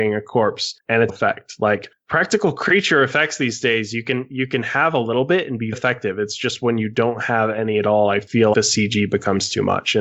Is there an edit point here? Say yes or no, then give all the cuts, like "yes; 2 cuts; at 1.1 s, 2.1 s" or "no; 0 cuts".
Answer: yes; 3 cuts; at 1.1 s, 5.7 s, 8.5 s